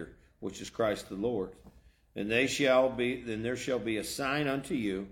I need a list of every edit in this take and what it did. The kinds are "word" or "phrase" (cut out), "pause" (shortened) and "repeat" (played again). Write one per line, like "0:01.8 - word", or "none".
none